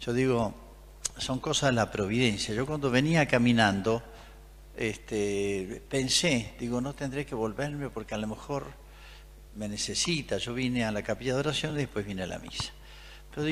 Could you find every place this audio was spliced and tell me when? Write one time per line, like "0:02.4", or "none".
none